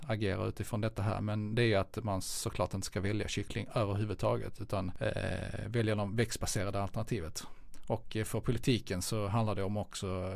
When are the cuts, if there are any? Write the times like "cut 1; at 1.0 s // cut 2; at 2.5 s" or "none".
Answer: none